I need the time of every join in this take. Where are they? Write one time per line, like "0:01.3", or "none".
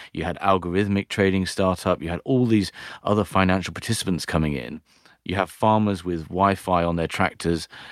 none